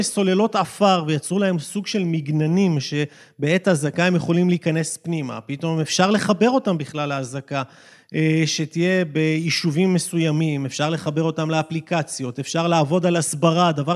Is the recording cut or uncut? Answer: uncut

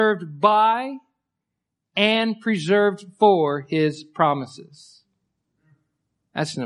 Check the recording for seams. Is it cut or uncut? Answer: uncut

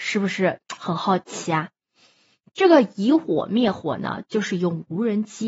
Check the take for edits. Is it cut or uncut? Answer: uncut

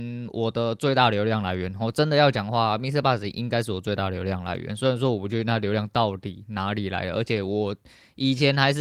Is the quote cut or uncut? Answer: uncut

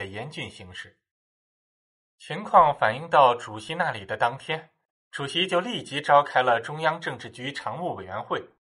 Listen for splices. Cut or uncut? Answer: uncut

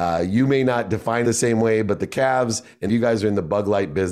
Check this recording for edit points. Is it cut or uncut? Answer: cut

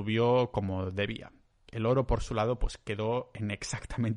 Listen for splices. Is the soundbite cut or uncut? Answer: uncut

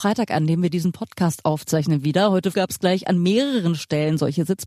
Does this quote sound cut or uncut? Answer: cut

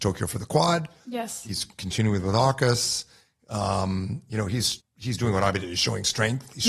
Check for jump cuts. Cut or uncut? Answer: cut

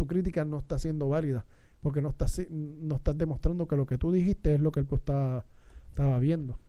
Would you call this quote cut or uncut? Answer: cut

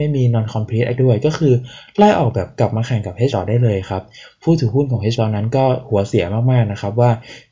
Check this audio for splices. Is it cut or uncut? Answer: cut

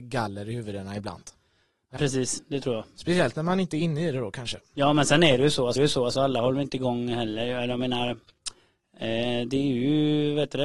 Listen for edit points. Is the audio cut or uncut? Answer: cut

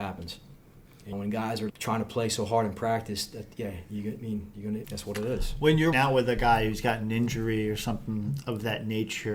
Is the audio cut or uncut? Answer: cut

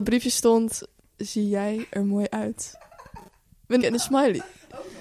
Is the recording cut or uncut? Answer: cut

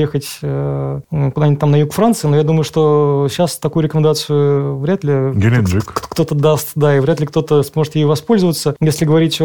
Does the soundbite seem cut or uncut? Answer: uncut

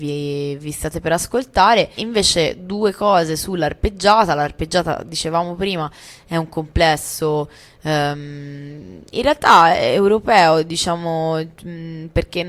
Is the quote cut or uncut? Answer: cut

